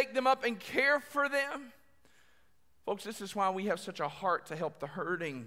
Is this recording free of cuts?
yes; 0 cuts

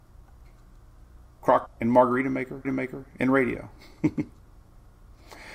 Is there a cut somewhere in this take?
yes; 2 cuts; at 1.7 s, 2.6 s

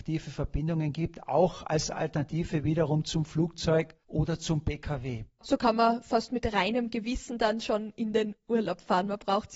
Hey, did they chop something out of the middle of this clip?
no; 0 cuts

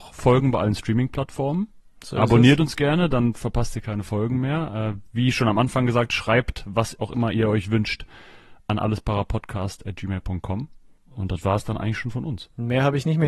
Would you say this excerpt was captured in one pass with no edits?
yes; 0 cuts

